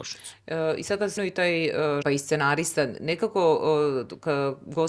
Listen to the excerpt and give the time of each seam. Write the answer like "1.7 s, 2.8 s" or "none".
1.2 s, 2.0 s